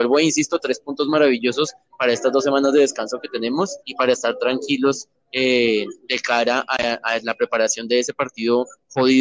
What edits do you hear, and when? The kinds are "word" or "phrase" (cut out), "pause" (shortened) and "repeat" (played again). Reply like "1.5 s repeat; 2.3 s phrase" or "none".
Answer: 3.8 s pause

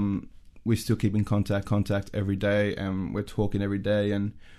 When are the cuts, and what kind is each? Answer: 1.6 s repeat

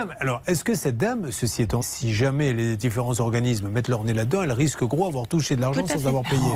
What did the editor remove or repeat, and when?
1.8 s word

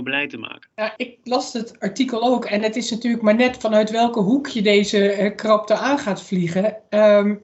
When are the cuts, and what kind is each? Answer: 1.0 s word

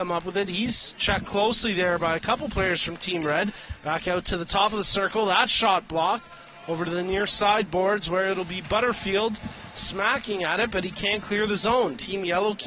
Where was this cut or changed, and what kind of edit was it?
none

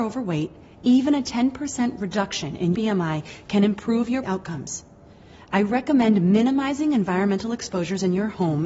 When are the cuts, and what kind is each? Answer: 2.7 s word; 4.2 s word

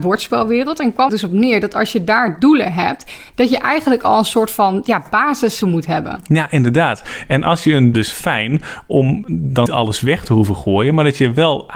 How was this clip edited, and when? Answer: 1.1 s phrase; 5.6 s word; 7.9 s phrase; 9.7 s word

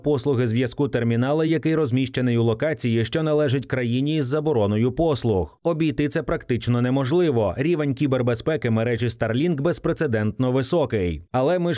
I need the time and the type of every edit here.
none

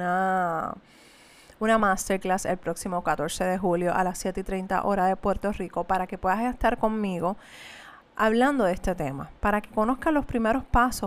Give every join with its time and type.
none

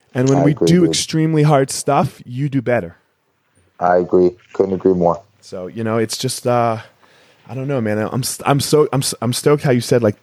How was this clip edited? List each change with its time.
none

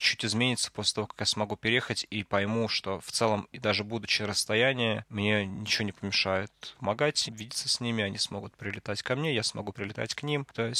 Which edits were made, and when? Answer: 6.7 s phrase; 7.3 s word

